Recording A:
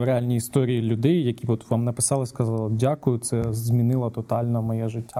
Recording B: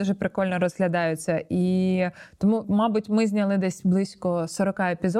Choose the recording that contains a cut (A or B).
B